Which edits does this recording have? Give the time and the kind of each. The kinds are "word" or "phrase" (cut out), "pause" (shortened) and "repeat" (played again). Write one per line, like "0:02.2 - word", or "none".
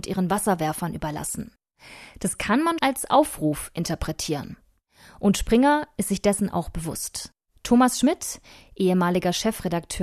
0:02.8 - word